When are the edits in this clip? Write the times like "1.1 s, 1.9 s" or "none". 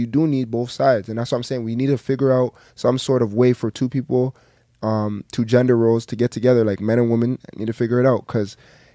none